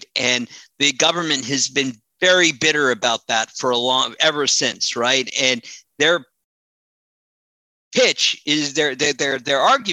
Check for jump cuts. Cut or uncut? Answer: uncut